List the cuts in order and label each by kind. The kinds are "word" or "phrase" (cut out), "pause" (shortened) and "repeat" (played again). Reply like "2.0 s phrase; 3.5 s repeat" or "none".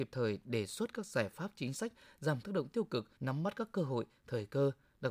2.4 s word; 3.2 s pause

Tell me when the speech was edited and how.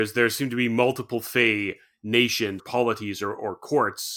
2.6 s word

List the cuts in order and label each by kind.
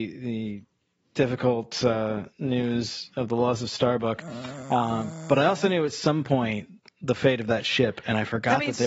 2.3 s pause; 6.8 s pause

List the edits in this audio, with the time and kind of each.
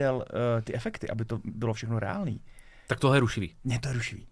none

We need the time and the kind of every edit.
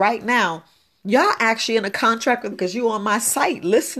2.5 s word

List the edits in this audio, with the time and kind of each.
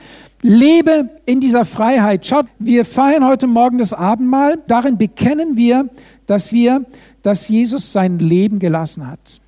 1.2 s pause; 2.5 s word; 4.7 s word; 6.5 s repeat

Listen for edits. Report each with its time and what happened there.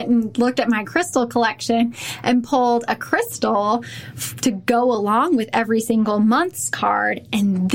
none

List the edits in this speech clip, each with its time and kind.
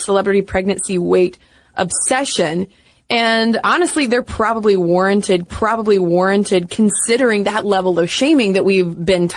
5.5 s repeat

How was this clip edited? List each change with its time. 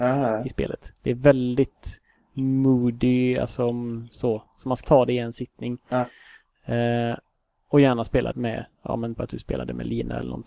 4.8 s word; 8.3 s word; 9.1 s word

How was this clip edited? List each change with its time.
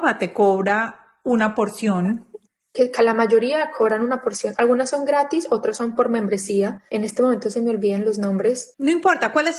2.4 s pause; 6.9 s pause

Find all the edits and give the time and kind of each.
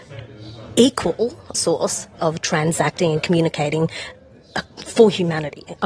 1.5 s word; 2.2 s word

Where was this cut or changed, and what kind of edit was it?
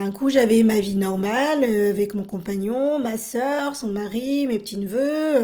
none

